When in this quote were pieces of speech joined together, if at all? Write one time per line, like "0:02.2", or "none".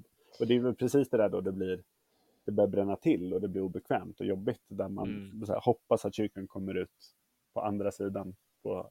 none